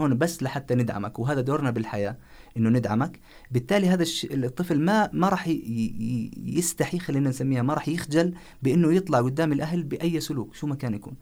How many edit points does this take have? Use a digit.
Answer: 0